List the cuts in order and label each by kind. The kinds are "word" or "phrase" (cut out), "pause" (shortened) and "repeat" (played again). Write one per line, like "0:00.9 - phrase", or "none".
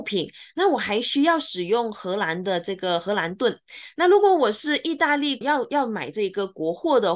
0:05.4 - word